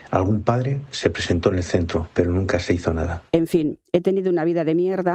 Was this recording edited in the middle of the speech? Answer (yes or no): yes